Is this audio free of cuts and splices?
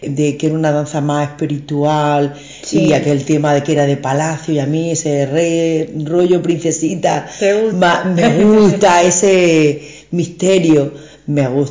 yes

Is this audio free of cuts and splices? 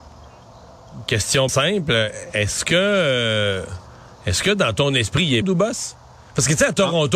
no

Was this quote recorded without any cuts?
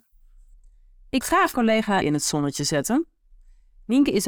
no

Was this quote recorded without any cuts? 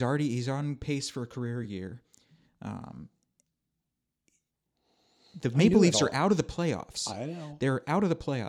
yes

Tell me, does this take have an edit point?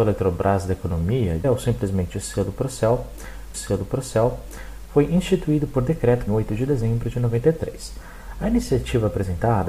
yes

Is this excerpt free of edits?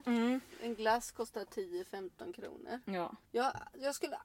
no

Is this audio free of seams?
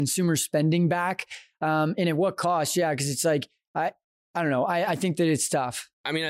yes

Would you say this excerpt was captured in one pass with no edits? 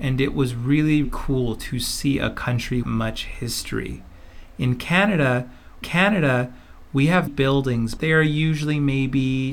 no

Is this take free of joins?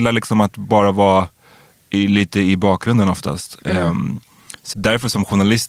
no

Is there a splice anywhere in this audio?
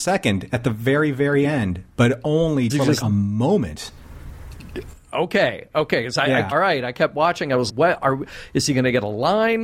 yes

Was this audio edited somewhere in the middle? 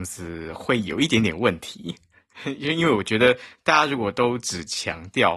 no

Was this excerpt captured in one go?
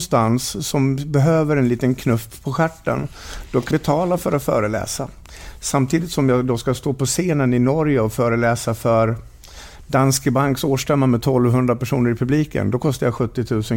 no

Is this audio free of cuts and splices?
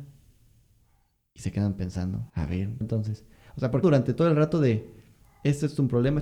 no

